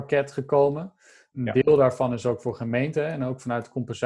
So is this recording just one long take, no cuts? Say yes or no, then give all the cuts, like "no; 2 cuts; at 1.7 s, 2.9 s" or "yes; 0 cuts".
yes; 0 cuts